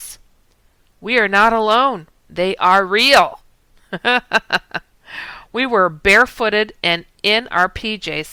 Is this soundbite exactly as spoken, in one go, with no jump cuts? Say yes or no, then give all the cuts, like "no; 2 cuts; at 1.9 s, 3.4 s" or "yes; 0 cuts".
no; 1 cut; at 2.2 s